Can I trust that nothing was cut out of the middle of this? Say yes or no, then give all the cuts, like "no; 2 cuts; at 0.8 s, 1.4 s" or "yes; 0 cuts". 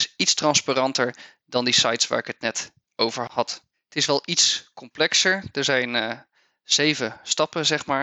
yes; 0 cuts